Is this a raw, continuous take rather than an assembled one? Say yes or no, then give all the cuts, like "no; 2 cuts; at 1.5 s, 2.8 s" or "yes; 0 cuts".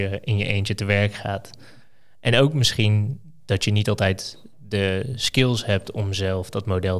yes; 0 cuts